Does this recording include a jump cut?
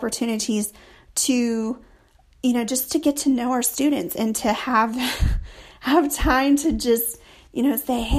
no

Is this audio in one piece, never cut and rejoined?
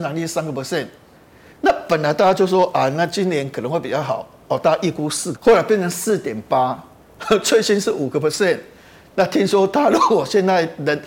no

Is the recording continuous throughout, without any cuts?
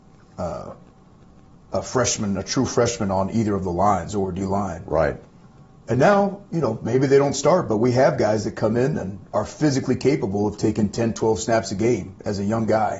yes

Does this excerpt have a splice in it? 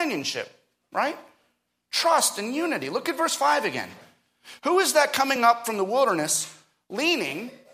no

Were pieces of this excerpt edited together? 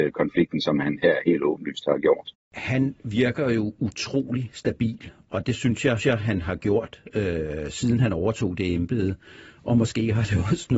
yes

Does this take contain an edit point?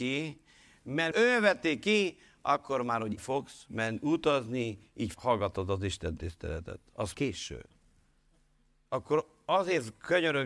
yes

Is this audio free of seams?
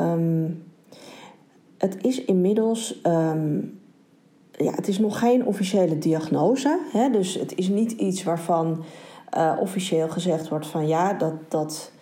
yes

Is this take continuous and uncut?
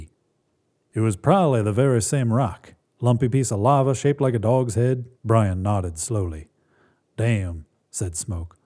no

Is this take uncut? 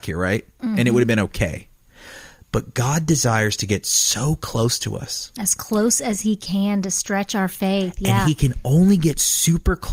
yes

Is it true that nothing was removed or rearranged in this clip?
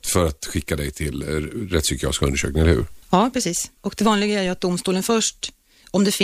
no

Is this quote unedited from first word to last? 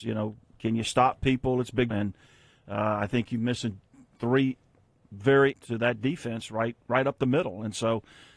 no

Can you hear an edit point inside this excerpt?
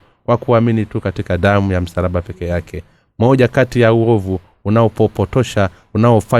no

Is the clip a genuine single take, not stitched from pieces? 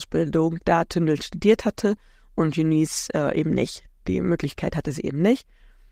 yes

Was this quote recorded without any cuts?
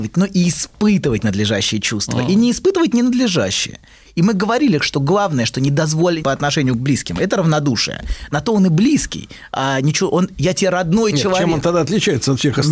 no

